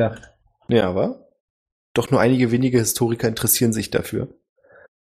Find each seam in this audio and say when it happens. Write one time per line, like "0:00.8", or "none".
none